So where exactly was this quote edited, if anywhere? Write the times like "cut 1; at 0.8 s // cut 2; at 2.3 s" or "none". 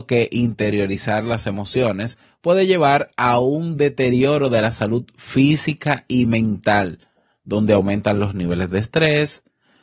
none

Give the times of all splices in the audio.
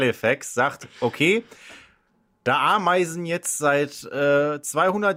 none

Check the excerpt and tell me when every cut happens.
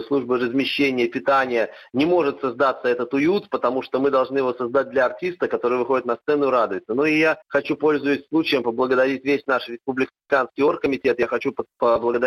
cut 1; at 7.4 s // cut 2; at 10.2 s

